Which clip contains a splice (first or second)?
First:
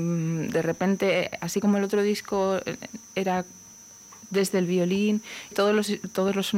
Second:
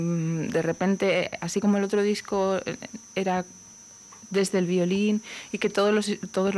first